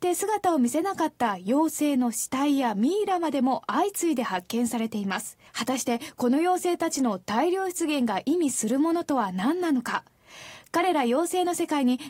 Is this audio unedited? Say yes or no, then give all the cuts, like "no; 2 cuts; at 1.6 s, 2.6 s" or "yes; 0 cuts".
no; 1 cut; at 5.5 s